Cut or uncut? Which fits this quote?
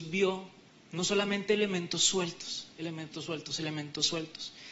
uncut